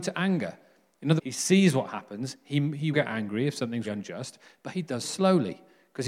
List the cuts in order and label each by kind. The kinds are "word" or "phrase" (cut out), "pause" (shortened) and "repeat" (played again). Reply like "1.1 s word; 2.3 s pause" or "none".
1.2 s word; 2.9 s word; 3.9 s word; 5.0 s word